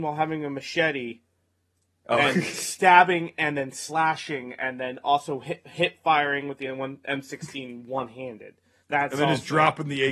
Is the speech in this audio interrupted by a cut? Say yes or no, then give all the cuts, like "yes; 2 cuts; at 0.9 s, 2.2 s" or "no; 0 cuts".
no; 0 cuts